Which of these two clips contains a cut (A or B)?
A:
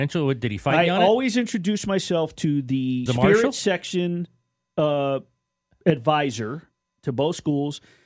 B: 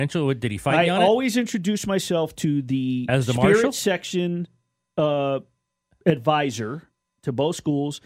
A